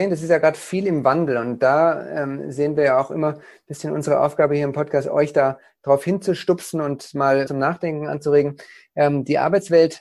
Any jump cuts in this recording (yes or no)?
yes